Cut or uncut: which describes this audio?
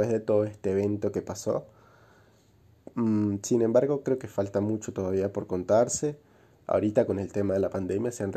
uncut